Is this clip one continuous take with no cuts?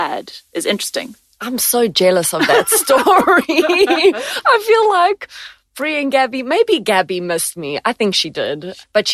yes; 0 cuts

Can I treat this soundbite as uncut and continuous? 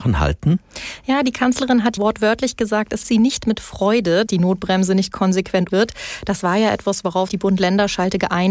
no; 5 cuts; at 2.0 s, 3.0 s, 4.3 s, 5.7 s, 7.3 s

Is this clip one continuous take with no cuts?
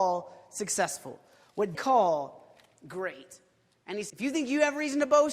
no; 2 cuts; at 1.7 s, 4.1 s

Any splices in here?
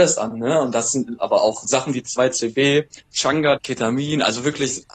yes; 2 cuts; at 1.6 s, 3.6 s

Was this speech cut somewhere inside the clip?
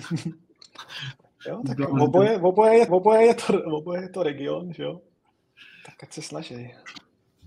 yes; 1 cut; at 2.9 s

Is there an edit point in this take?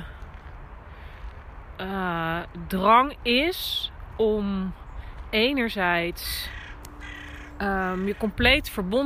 no; 0 cuts

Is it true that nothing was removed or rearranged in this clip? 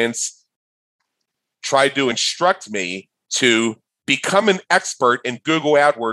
yes; 0 cuts

